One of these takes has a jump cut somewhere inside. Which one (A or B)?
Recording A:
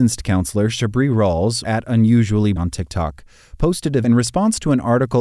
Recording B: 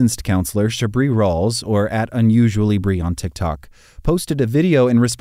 A